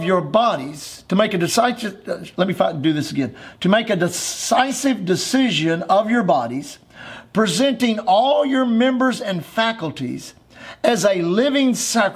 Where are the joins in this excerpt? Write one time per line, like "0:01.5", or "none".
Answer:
none